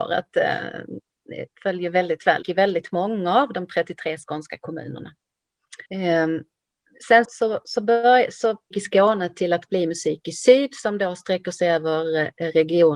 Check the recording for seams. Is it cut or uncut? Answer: cut